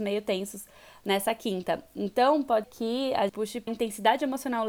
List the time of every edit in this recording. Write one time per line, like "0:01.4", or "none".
0:02.6
0:03.3
0:03.7

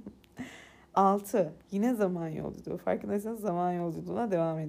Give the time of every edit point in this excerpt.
none

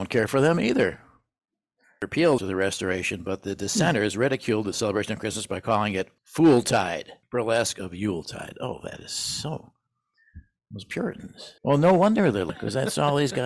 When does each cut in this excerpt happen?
0:02.4
0:06.2
0:07.2
0:11.6

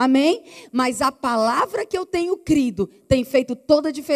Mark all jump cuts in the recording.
none

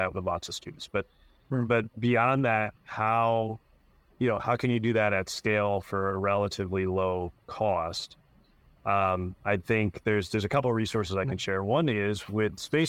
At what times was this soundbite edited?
none

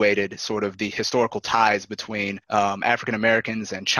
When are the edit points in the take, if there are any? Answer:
0:02.4

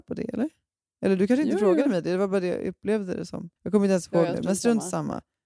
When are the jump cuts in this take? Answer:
0:03.6

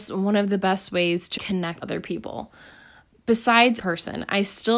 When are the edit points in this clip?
0:01.4
0:01.8
0:03.8

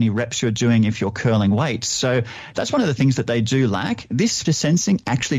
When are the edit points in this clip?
0:04.4

